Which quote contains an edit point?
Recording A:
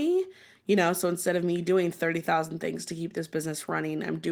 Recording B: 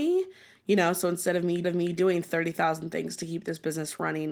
B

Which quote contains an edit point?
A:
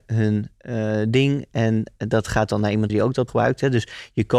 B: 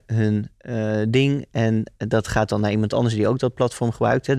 A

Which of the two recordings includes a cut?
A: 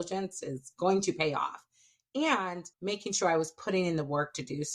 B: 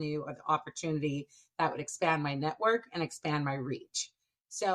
A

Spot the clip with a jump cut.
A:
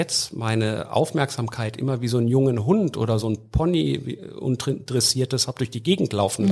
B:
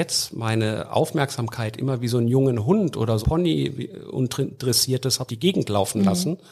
B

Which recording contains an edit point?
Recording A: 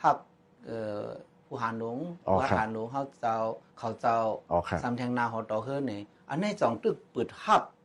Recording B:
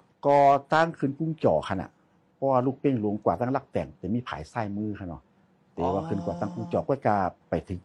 A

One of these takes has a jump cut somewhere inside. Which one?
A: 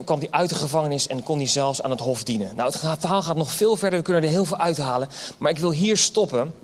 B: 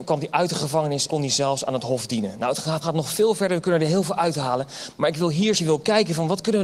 B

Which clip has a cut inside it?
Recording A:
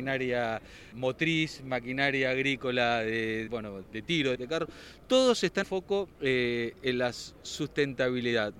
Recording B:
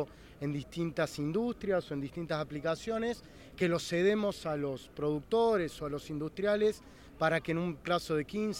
A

